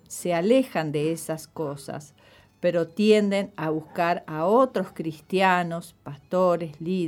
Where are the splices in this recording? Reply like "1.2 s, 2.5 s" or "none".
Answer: none